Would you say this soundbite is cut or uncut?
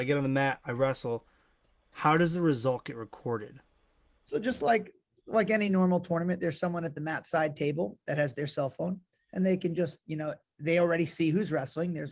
uncut